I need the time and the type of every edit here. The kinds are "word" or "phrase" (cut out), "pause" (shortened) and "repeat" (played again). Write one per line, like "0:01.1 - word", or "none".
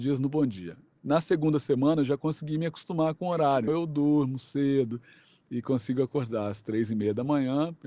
0:03.7 - word